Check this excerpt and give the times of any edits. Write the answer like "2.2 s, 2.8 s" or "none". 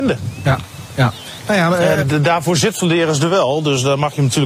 2.0 s